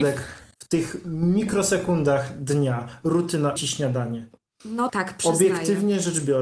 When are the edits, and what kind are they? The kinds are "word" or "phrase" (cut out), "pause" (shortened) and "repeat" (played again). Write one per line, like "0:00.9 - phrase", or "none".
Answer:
0:03.6 - word
0:04.9 - word